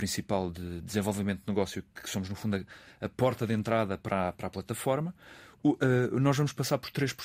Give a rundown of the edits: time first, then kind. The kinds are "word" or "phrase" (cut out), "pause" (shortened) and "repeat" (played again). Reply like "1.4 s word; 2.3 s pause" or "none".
none